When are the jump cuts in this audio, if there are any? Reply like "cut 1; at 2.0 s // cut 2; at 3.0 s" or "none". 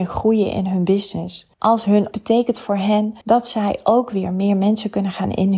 cut 1; at 1.5 s // cut 2; at 2.1 s // cut 3; at 3.2 s